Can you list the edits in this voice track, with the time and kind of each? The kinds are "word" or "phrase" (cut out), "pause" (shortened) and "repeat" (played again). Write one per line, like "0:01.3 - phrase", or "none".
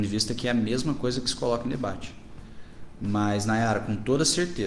none